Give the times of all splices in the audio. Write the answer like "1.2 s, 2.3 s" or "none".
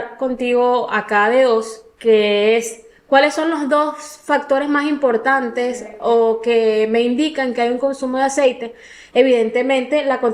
none